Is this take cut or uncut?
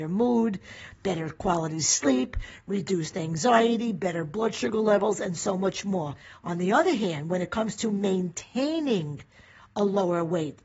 uncut